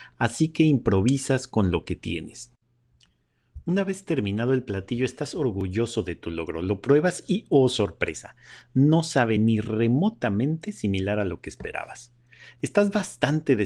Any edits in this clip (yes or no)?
no